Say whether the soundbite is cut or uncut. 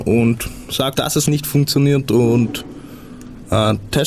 cut